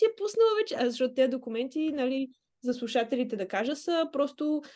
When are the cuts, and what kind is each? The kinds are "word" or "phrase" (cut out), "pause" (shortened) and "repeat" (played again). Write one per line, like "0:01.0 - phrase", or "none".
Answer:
none